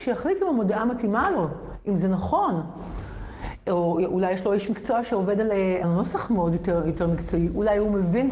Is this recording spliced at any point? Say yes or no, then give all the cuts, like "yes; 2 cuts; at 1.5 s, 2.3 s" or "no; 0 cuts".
yes; 1 cut; at 5.8 s